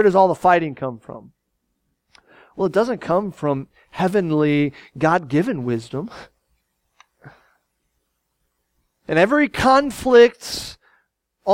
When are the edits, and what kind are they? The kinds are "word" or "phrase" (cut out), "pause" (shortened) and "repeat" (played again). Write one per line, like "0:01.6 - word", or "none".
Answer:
none